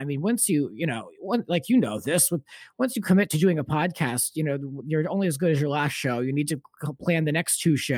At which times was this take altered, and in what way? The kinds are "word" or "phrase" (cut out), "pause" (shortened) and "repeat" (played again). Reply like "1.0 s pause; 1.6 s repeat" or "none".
none